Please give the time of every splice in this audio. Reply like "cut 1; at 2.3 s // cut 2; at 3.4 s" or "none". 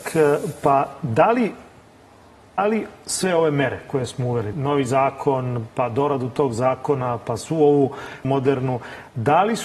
cut 1; at 2.6 s // cut 2; at 4.5 s // cut 3; at 8.2 s